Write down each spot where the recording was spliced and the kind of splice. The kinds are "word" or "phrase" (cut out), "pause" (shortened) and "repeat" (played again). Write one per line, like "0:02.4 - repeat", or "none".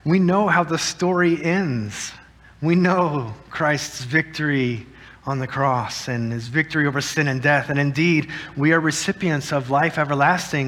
none